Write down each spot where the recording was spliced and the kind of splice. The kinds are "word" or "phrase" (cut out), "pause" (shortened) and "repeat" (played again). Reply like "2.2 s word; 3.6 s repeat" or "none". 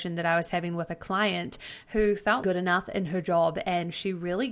2.4 s phrase